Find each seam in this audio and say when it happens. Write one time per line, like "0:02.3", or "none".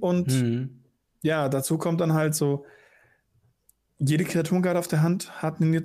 none